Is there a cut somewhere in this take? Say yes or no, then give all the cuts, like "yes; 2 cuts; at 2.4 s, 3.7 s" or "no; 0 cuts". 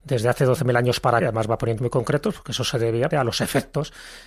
yes; 3 cuts; at 1.2 s, 1.8 s, 3.1 s